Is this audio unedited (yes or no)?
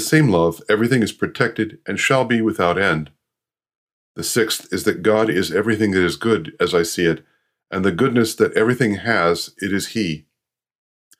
yes